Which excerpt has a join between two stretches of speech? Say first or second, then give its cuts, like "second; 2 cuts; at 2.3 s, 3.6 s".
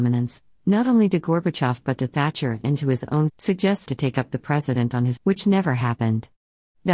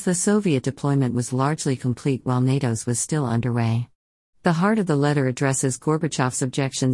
first; 3 cuts; at 3.3 s, 3.9 s, 5.2 s